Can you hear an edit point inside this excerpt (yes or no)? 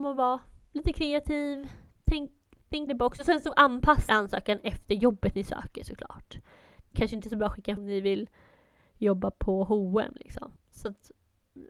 yes